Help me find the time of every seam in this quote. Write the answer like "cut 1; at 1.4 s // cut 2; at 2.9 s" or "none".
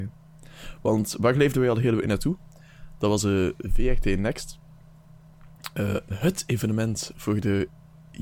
none